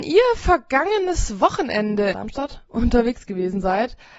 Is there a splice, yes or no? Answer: yes